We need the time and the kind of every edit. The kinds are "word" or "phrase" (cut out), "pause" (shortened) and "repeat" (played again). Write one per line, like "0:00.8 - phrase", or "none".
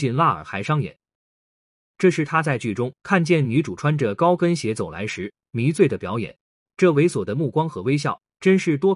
none